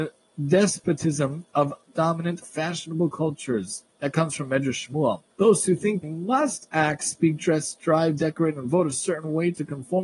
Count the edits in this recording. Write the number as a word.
three